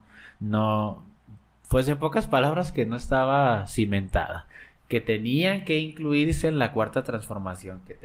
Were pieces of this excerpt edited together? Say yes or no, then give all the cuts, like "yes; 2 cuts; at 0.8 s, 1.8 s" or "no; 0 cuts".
no; 0 cuts